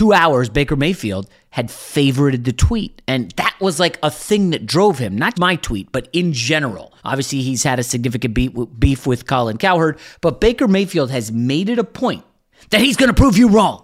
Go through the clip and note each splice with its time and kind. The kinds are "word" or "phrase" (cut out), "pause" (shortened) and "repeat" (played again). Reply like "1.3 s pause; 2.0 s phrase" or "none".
5.3 s word; 7.0 s pause; 12.5 s pause